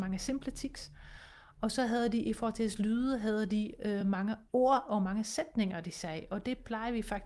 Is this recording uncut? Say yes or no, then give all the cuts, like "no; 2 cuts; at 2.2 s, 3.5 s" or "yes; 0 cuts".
yes; 0 cuts